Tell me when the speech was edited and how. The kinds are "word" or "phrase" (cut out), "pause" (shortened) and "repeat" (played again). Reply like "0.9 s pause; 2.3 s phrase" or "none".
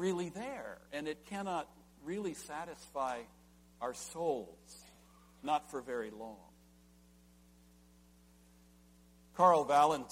none